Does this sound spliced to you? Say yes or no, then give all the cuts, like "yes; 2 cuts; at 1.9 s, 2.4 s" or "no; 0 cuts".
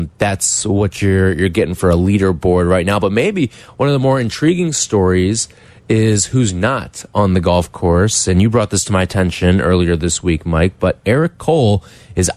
no; 0 cuts